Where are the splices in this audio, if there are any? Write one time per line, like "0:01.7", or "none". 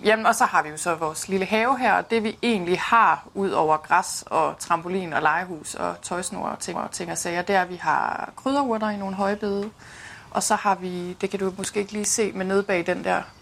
0:06.7